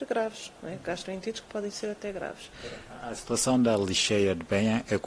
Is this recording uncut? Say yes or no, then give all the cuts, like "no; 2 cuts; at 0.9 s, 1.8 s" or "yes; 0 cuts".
yes; 0 cuts